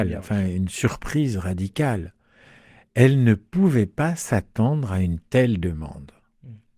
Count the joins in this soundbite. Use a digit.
0